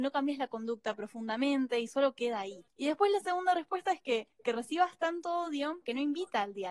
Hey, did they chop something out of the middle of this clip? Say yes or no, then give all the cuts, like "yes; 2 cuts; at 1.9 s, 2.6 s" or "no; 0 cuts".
no; 0 cuts